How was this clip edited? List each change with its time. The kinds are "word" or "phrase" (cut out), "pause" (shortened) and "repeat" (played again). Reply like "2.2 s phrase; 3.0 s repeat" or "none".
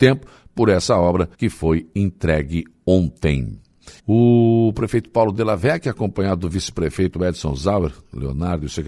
1.3 s pause; 4.0 s pause